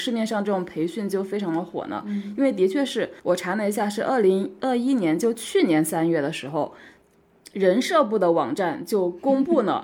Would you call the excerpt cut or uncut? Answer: cut